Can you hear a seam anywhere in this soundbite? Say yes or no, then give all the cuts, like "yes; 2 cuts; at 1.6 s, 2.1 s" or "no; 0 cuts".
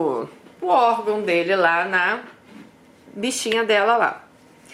no; 0 cuts